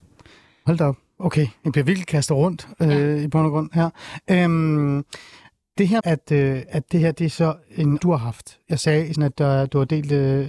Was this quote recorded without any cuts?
no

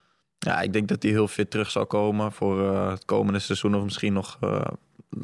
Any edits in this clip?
no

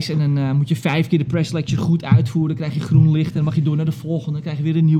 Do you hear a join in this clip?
no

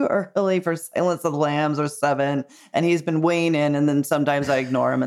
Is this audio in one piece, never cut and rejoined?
yes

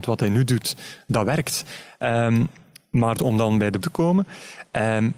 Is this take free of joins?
no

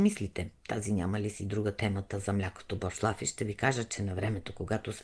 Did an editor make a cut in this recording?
no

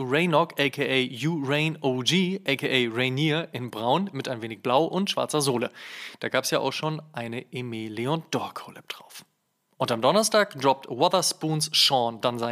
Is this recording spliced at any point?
no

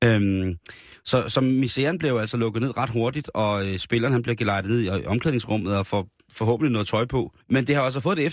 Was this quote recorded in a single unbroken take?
no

